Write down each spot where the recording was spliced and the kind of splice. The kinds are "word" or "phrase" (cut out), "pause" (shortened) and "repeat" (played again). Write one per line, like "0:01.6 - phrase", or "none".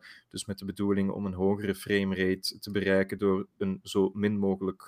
none